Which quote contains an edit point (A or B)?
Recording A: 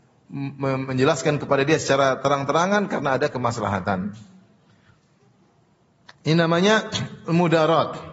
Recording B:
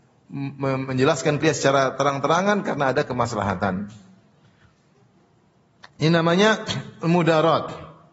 B